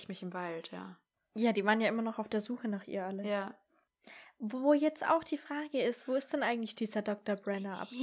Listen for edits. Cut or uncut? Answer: uncut